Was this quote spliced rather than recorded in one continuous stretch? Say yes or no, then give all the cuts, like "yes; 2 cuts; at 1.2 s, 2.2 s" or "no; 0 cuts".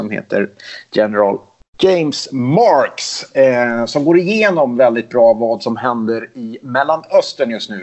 yes; 1 cut; at 1.6 s